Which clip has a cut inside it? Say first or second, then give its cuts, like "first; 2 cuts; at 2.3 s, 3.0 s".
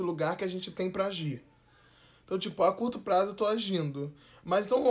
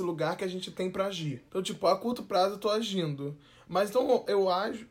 second; 1 cut; at 1.5 s